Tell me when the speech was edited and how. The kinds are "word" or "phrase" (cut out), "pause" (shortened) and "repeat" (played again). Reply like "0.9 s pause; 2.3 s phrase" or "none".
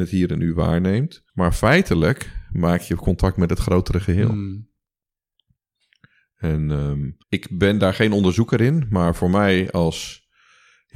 1.3 s pause; 7.2 s pause

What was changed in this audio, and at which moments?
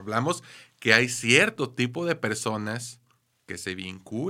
none

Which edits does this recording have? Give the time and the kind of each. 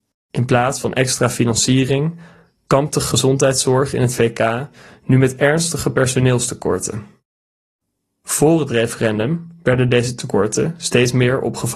none

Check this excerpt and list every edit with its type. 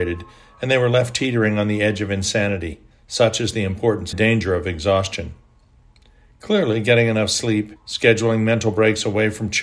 2.9 s pause; 4.1 s phrase; 7.8 s pause

